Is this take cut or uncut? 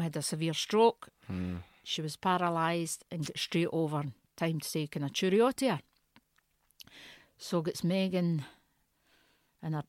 uncut